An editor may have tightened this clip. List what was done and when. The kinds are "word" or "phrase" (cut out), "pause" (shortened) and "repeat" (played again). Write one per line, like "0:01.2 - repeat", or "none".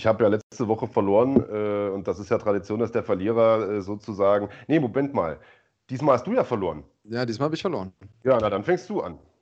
none